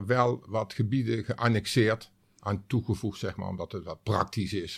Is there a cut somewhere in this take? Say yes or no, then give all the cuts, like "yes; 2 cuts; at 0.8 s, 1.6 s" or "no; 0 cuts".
no; 0 cuts